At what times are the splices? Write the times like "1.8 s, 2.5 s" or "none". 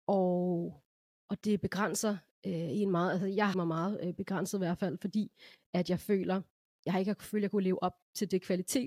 3.5 s